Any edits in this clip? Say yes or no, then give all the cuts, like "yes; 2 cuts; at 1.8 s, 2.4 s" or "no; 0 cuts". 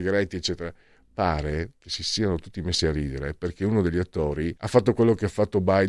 yes; 1 cut; at 4.6 s